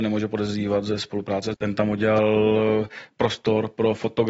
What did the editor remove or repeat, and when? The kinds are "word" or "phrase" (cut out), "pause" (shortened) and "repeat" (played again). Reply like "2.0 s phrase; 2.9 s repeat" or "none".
1.5 s phrase; 3.1 s pause